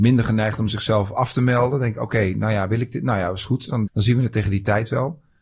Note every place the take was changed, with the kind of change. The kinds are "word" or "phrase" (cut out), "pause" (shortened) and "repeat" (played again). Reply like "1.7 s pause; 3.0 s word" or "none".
3.9 s word